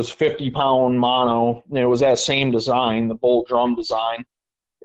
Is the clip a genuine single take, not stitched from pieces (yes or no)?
yes